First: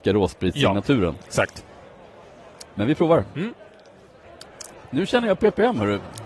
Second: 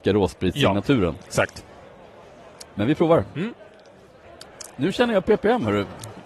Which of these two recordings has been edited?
second; 1 cut; at 4.7 s

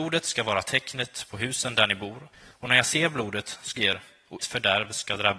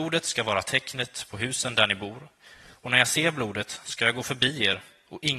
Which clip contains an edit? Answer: first; 3 cuts; at 2.3 s, 3.8 s, 4.4 s

